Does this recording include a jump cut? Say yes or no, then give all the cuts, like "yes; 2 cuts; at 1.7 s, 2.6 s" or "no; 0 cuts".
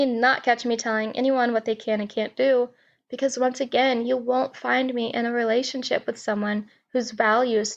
no; 0 cuts